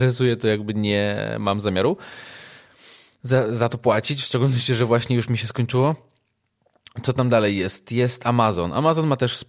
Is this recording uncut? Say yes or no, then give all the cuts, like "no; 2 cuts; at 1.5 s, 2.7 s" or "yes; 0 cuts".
yes; 0 cuts